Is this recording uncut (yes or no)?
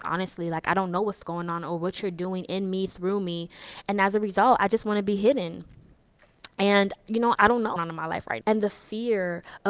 no